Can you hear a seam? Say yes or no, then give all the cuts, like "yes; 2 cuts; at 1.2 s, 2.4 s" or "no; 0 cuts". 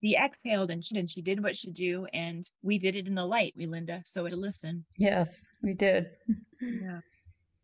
yes; 7 cuts; at 0.9 s, 1.6 s, 2.5 s, 3.5 s, 4.3 s, 4.9 s, 6.5 s